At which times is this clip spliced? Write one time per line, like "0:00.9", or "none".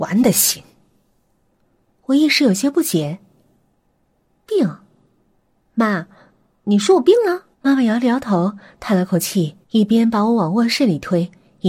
0:07.5
0:09.6